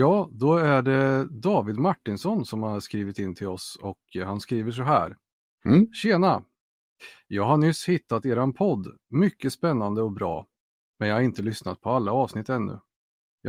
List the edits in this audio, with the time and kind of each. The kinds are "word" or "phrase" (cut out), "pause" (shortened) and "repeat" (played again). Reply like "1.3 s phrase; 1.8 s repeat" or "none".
none